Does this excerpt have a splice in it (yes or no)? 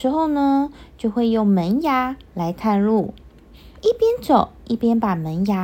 yes